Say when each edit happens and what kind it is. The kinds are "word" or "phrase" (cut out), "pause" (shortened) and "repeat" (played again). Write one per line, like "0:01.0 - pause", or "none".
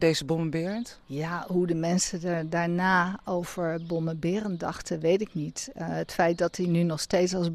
none